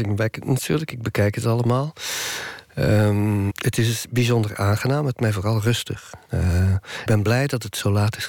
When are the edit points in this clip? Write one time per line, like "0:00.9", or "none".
0:03.5
0:05.1
0:07.1